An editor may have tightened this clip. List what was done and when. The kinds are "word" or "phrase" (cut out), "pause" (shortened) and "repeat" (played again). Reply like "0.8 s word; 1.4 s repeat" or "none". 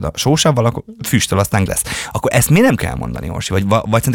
1.7 s word; 2.8 s word